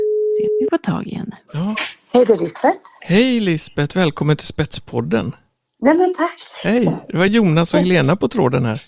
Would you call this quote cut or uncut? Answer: uncut